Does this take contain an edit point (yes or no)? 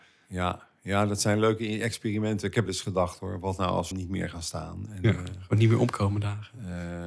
yes